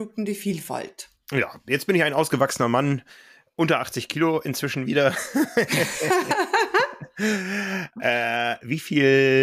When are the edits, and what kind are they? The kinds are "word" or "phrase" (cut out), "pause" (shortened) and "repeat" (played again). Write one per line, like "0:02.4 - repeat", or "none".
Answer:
none